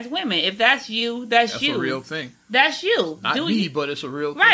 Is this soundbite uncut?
yes; 0 cuts

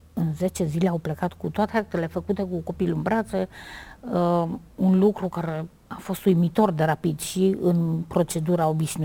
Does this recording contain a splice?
yes; 1 cut; at 5.8 s

